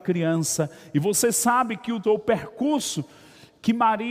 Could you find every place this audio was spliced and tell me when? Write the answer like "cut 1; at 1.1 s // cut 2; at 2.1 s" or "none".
cut 1; at 2.0 s